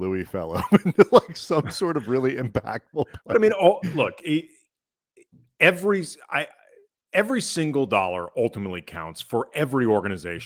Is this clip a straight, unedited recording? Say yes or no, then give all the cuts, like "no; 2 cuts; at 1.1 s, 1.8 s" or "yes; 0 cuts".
yes; 0 cuts